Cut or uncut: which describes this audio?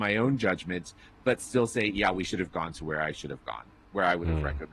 uncut